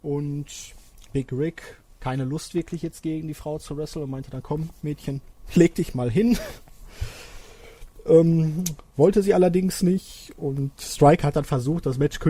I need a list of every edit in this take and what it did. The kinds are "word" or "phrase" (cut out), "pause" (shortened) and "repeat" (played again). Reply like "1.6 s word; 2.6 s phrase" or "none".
1.9 s pause